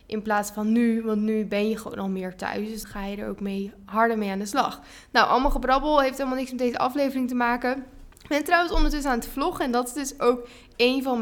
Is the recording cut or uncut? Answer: cut